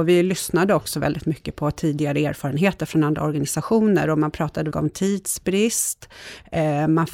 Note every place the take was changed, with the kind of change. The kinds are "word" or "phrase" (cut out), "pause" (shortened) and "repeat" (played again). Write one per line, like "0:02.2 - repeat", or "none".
0:04.7 - phrase